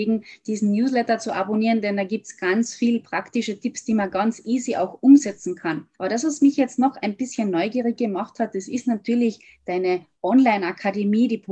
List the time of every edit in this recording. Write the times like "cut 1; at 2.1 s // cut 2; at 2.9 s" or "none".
cut 1; at 5.9 s